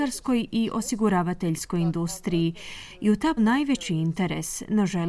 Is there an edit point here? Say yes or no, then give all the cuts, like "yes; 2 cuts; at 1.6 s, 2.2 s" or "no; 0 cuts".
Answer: yes; 1 cut; at 3.4 s